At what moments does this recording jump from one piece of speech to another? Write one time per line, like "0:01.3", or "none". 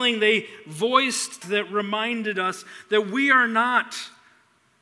0:01.4